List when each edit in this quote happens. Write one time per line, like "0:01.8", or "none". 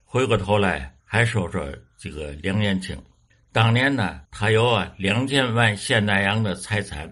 0:01.0
0:03.3
0:04.2